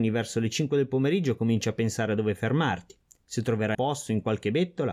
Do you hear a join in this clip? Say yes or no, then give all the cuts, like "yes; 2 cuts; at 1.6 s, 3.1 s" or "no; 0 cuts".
yes; 1 cut; at 3.7 s